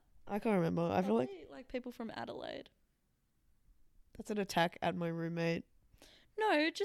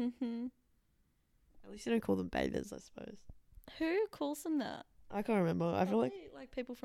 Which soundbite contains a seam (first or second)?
first